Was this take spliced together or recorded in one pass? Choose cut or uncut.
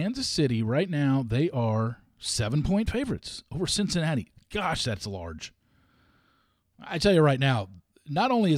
uncut